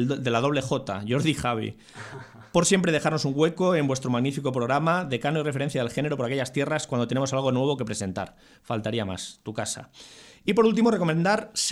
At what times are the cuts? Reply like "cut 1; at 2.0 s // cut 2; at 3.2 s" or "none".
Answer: none